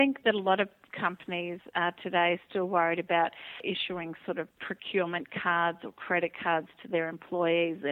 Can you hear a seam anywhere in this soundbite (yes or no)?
yes